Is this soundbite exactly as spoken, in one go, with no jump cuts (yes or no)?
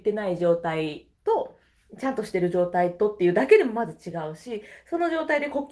no